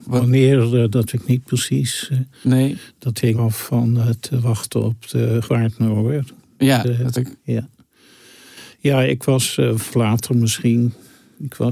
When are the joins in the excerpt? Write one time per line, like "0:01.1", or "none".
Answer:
0:01.1
0:03.3
0:05.4
0:06.8
0:07.1
0:09.9

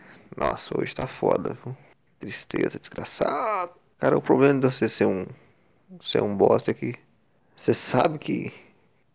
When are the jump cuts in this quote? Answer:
none

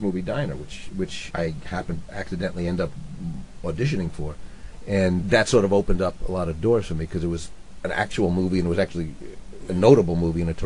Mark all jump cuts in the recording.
0:01.3
0:02.1
0:05.2

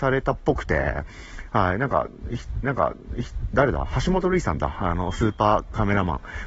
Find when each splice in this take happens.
0:02.6

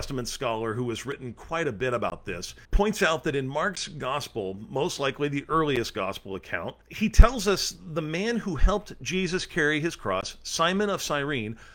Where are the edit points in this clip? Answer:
0:02.6
0:06.8

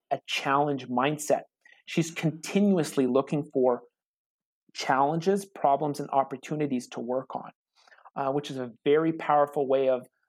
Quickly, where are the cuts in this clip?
none

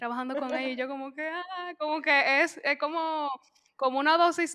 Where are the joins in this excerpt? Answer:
none

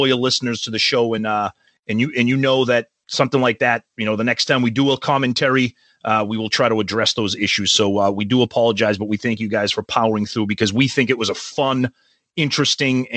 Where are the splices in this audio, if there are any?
none

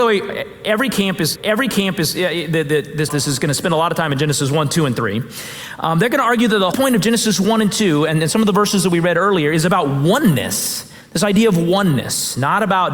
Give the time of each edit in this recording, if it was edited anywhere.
0:01.4
0:03.1
0:06.7

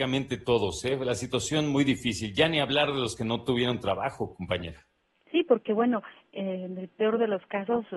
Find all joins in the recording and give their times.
none

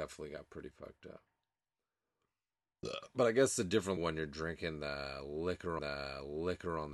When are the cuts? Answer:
0:04.0
0:05.8

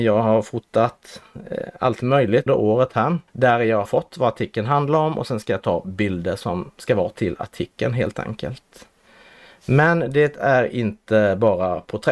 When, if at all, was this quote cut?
0:02.5
0:03.3
0:03.8

